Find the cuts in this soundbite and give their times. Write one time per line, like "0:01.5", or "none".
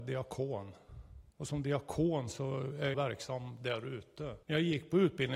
0:01.3
0:02.9
0:04.4